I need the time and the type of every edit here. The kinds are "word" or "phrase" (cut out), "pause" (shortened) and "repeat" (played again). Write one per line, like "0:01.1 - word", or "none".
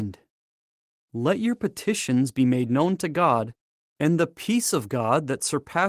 none